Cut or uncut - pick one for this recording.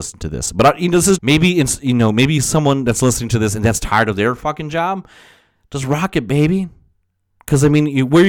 cut